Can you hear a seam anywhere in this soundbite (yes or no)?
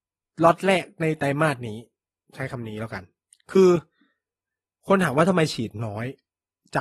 no